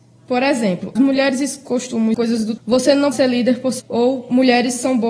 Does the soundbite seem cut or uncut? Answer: cut